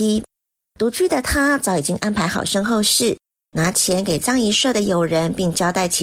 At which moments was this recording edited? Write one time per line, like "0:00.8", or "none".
none